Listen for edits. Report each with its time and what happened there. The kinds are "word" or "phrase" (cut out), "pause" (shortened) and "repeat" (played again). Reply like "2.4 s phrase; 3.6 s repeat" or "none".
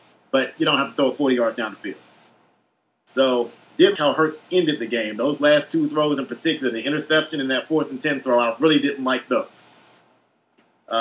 4.0 s word